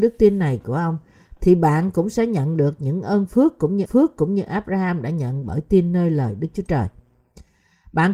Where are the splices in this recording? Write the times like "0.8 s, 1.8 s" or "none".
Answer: 3.9 s